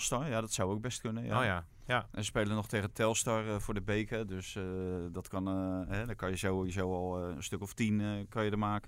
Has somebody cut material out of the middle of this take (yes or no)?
no